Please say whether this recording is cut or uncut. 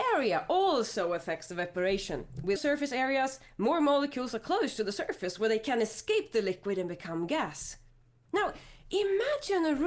cut